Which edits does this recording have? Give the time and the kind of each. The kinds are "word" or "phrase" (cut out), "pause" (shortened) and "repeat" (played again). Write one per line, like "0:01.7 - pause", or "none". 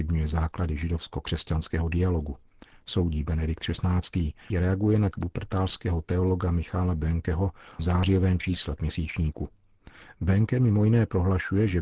0:04.5 - word
0:05.1 - word
0:07.8 - word
0:08.8 - word

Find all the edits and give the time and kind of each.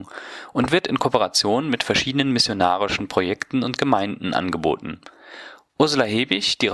none

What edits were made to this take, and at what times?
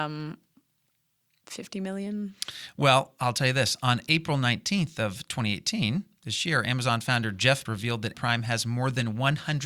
0:07.7 - word
0:08.1 - word

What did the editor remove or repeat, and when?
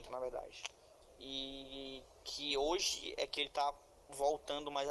none

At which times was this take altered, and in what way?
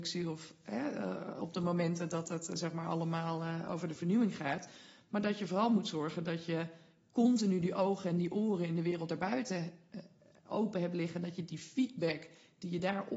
none

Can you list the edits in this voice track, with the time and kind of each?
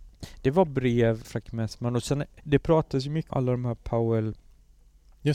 0:01.2 - word
0:02.4 - word
0:03.3 - word

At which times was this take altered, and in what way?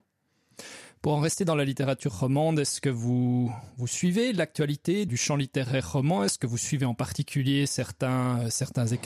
0:05.1 - word

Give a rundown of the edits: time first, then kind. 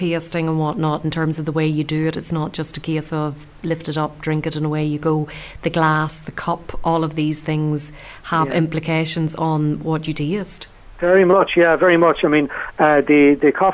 none

